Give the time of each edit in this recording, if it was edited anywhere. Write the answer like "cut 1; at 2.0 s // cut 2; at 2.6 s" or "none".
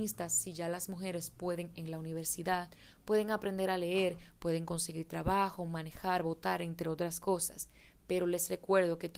cut 1; at 1.7 s